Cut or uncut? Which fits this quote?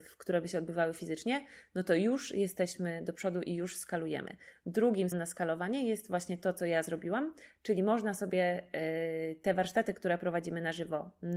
cut